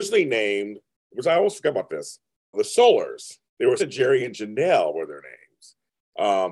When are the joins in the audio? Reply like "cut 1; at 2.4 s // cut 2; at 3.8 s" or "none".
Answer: cut 1; at 2.5 s // cut 2; at 3.5 s // cut 3; at 3.8 s